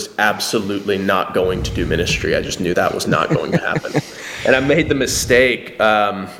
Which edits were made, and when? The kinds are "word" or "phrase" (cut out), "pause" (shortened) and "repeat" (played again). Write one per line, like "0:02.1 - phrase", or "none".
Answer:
0:02.7 - word